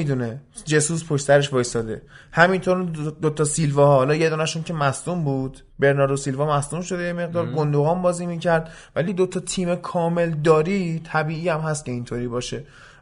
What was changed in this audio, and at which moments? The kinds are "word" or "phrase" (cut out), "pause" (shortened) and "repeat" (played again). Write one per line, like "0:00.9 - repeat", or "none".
0:05.7 - pause
0:09.1 - phrase